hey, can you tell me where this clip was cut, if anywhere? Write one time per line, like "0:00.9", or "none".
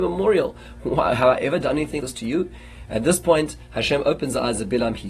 0:02.0